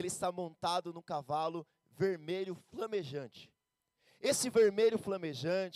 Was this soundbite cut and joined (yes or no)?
no